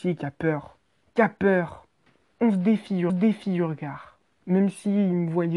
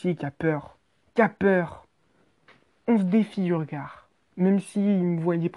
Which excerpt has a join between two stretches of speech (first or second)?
first